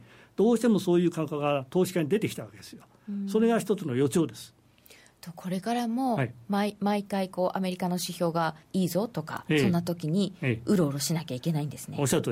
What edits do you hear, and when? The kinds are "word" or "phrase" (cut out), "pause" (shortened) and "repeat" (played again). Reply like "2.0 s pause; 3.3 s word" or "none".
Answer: 8.6 s pause